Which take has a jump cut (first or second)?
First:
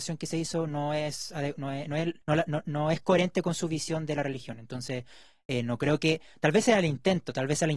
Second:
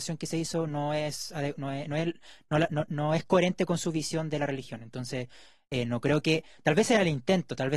first